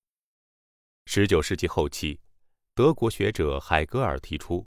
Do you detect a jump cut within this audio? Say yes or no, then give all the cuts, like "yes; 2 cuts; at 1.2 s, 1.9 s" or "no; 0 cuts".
no; 0 cuts